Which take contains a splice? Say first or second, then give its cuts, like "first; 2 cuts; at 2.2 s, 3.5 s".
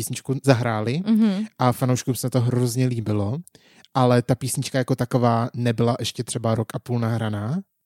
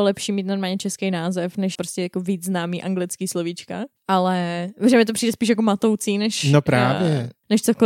second; 2 cuts; at 1.7 s, 4.0 s